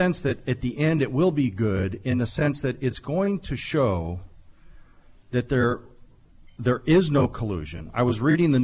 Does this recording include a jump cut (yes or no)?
no